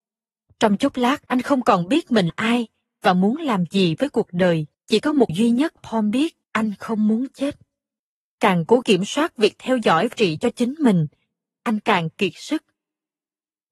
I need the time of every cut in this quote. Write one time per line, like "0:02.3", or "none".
0:01.3
0:02.3
0:04.7
0:05.3
0:05.8
0:06.4
0:08.0
0:08.8
0:10.1